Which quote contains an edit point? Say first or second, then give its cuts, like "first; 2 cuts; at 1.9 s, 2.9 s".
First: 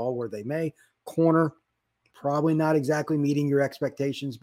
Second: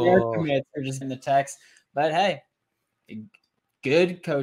second; 1 cut; at 1.0 s